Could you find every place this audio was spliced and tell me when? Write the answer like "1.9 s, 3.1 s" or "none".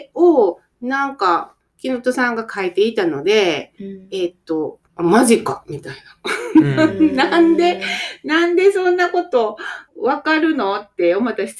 4.9 s, 9.9 s